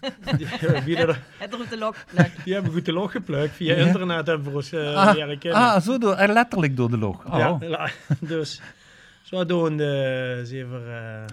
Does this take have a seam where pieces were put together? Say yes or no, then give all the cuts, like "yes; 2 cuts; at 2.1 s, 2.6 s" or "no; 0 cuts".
no; 0 cuts